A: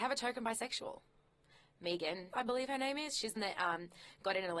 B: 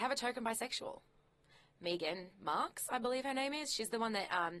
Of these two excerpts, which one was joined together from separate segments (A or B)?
A